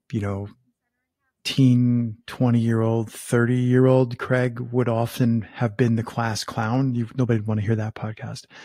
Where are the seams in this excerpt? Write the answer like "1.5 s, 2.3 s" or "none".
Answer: none